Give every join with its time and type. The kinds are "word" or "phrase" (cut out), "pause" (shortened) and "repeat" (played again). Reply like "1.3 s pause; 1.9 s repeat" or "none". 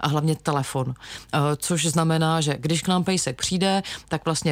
none